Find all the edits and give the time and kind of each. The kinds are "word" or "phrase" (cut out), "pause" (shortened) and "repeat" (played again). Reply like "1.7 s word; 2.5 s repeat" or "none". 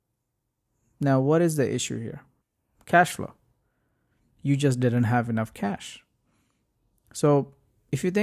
2.4 s pause